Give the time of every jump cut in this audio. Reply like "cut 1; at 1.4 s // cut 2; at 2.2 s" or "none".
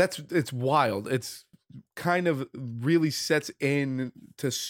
none

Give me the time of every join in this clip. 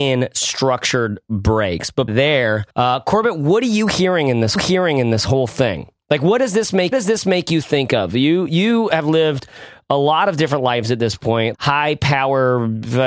cut 1; at 2.1 s // cut 2; at 2.7 s // cut 3; at 4.6 s // cut 4; at 6.9 s // cut 5; at 11.5 s

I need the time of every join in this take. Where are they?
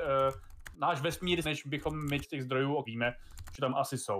cut 1; at 1.4 s // cut 2; at 2.2 s // cut 3; at 2.9 s

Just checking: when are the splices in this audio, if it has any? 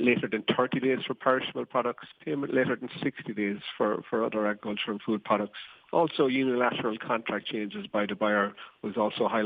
none

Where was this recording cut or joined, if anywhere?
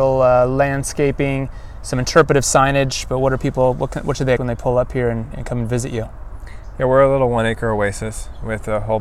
cut 1; at 4.4 s

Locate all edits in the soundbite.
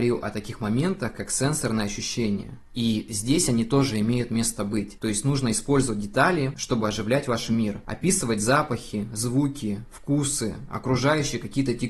none

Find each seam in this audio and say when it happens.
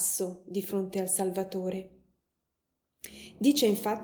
none

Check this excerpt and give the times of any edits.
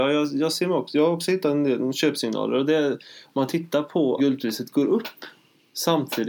cut 1; at 4.2 s

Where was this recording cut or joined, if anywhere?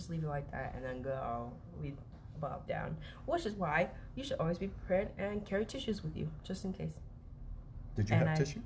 cut 1; at 2.7 s

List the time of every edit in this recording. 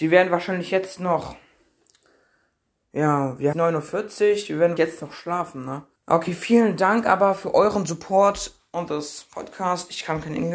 cut 1; at 3.5 s // cut 2; at 4.8 s // cut 3; at 6.0 s

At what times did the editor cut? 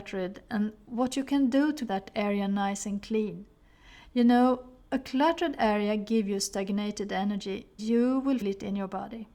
cut 1; at 1.9 s // cut 2; at 7.8 s // cut 3; at 8.4 s

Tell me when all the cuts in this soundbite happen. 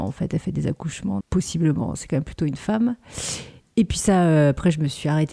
cut 1; at 1.2 s

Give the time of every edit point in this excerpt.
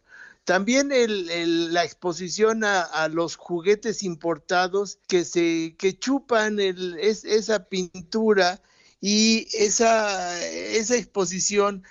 cut 1; at 5.0 s

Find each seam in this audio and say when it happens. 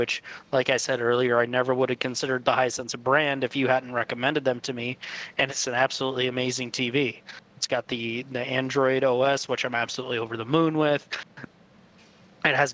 none

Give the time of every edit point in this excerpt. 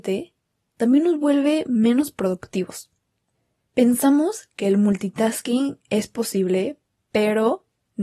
none

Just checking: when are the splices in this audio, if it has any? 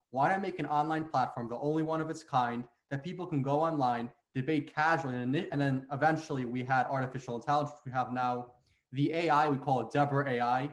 none

